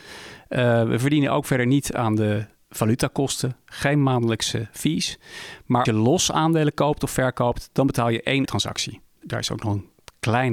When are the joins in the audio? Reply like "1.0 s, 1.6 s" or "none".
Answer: 5.9 s, 8.5 s, 9.2 s